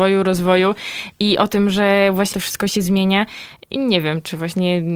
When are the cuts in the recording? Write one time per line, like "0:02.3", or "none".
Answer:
0:02.3
0:03.8